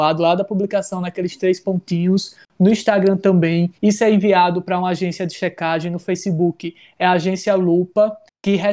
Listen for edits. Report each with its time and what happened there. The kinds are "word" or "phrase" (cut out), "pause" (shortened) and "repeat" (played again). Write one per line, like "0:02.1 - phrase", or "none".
0:03.8 - pause